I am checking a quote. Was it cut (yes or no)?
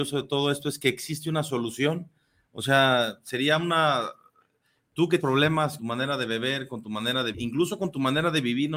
yes